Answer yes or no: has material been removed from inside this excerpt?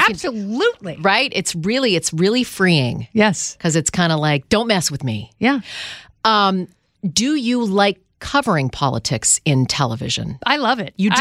no